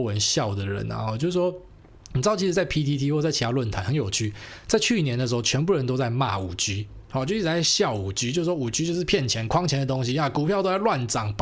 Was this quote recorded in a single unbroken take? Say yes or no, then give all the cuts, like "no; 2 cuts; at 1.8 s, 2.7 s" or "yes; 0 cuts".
yes; 0 cuts